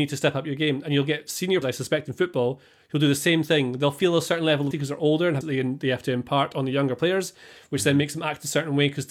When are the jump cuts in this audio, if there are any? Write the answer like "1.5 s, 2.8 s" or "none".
1.6 s, 4.7 s, 5.4 s

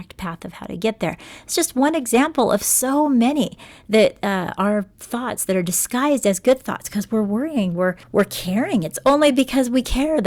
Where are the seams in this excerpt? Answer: 8.0 s

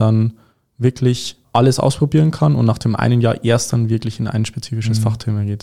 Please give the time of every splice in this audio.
1.4 s

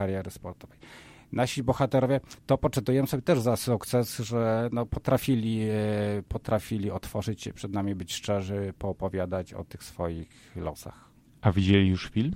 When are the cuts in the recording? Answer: 2.4 s

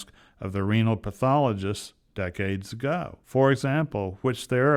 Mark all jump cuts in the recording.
3.2 s

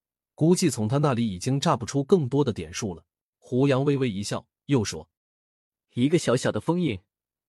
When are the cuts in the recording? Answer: 3.3 s, 5.2 s

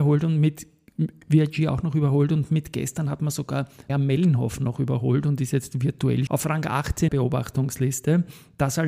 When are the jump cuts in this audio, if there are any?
3.9 s, 6.3 s, 7.1 s

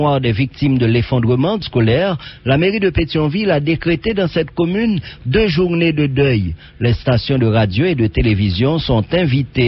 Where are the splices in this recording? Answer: 1.6 s

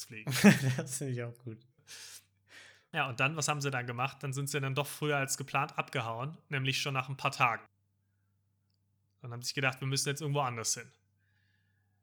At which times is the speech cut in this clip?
none

